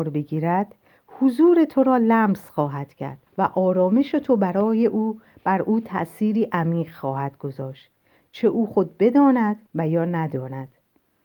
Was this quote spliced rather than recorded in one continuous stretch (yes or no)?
yes